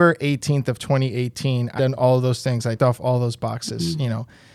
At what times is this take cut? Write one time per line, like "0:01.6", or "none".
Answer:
0:01.8
0:02.8

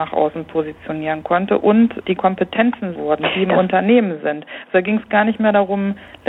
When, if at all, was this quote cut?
0:02.2
0:03.0

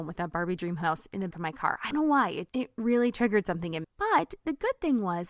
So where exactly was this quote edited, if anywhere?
0:01.3
0:01.9
0:02.5
0:03.8

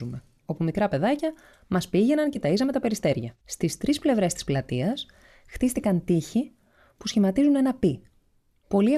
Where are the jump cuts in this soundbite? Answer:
0:03.4

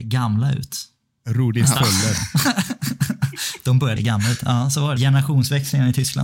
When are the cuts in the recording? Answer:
0:04.0
0:05.0

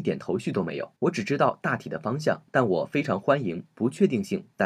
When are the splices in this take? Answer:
0:01.0
0:02.5

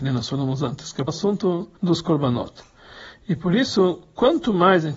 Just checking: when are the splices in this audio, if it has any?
0:01.1
0:01.8

